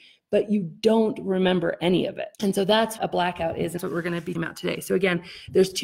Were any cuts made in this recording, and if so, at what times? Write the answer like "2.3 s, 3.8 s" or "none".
2.3 s, 3.0 s, 3.8 s, 4.3 s